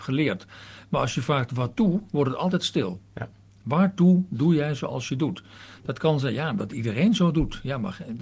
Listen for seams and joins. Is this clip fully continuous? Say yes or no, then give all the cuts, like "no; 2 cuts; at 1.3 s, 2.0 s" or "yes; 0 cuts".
yes; 0 cuts